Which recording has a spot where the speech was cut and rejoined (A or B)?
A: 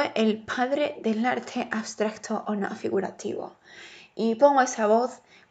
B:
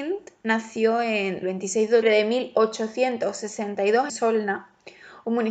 B